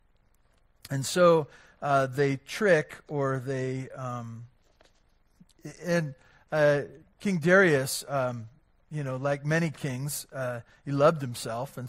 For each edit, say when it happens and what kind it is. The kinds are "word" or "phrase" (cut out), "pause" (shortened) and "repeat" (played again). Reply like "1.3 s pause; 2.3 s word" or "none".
none